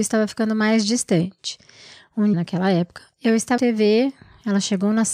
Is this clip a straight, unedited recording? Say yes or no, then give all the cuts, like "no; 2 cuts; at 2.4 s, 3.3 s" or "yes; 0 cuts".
no; 2 cuts; at 2.3 s, 3.6 s